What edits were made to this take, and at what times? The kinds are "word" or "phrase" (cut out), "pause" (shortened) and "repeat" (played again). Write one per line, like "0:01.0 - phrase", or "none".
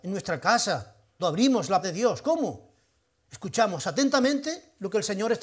0:01.2 - word
0:01.8 - word